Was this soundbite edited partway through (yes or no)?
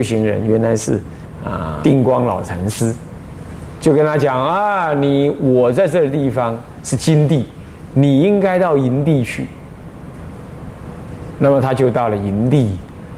yes